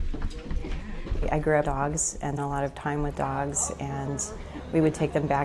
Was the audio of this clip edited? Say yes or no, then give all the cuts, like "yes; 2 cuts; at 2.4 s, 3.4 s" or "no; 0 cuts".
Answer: yes; 2 cuts; at 1.6 s, 2.4 s